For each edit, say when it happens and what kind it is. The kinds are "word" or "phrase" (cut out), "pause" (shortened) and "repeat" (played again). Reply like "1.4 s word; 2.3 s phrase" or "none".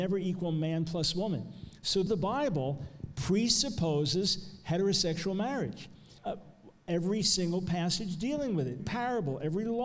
2.1 s phrase; 6.2 s pause; 8.8 s word